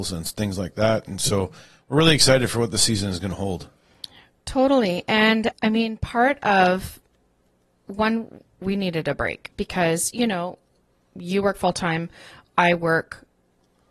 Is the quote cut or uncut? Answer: uncut